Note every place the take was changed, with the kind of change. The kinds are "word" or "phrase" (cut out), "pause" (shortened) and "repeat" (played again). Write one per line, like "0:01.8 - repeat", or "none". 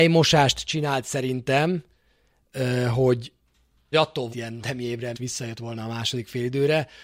0:03.9 - word
0:04.3 - word
0:04.6 - word
0:05.1 - word

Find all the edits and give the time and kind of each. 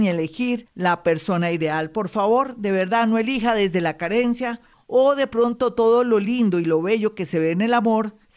none

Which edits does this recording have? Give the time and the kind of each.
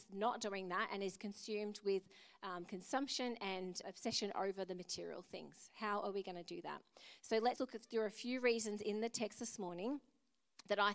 0:03.8 - word
0:07.6 - word

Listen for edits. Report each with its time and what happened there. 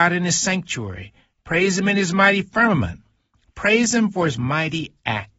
none

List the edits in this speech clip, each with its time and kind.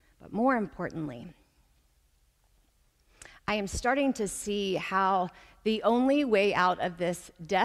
none

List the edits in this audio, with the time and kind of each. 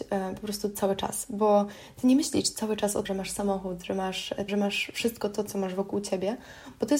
0:03.1 - phrase
0:04.5 - word

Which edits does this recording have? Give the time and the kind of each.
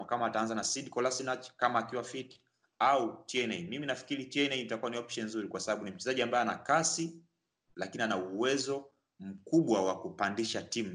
none

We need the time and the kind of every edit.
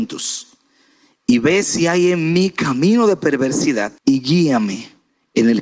0:04.0 - pause

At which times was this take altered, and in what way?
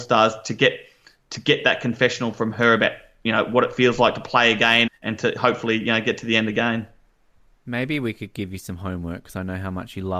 0:04.9 - word

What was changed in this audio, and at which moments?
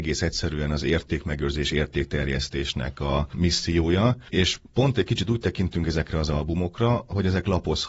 0:01.7 - word
0:04.9 - word

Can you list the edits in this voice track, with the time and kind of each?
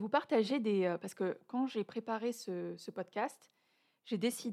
none

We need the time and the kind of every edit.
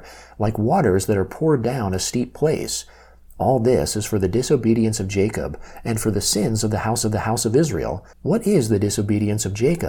0:07.0 - repeat
0:08.1 - pause

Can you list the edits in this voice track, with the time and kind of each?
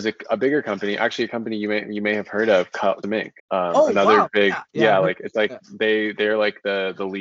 0:03.0 - word
0:03.4 - pause
0:04.7 - pause

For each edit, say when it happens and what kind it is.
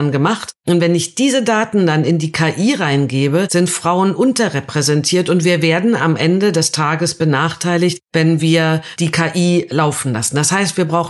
none

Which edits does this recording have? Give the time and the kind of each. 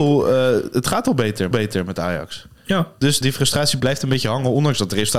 0:01.5 - repeat
0:03.2 - word
0:03.8 - word

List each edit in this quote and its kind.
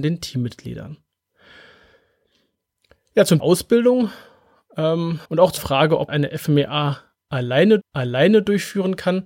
0:03.4 - word
0:05.3 - pause
0:05.6 - word
0:06.1 - word
0:07.8 - repeat

